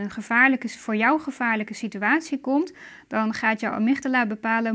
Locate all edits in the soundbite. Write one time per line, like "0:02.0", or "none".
none